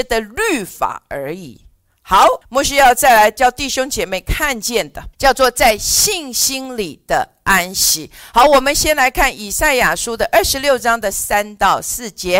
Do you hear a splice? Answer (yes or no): yes